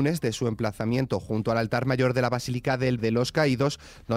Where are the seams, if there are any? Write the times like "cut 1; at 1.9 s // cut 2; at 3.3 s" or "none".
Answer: cut 1; at 3.0 s